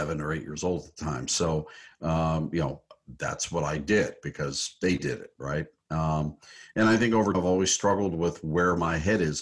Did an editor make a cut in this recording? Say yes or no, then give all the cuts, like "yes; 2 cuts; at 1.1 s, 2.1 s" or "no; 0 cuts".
yes; 1 cut; at 7.3 s